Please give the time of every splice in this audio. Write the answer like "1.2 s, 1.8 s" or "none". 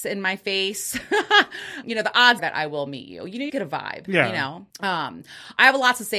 1.8 s, 2.4 s, 3.5 s, 4.7 s

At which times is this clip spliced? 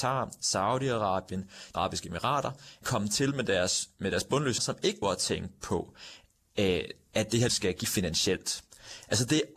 1.7 s, 2.8 s, 4.6 s, 5.0 s, 7.5 s, 7.8 s

